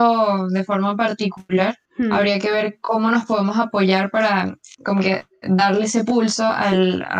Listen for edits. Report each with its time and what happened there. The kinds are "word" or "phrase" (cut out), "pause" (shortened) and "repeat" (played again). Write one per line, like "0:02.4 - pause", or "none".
0:01.8 - pause